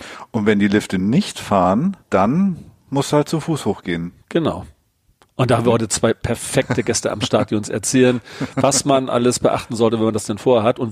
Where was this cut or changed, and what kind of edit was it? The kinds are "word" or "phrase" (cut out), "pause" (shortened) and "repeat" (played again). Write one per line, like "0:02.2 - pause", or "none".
0:02.0 - pause
0:04.2 - pause